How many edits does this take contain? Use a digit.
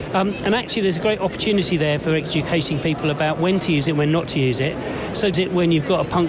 1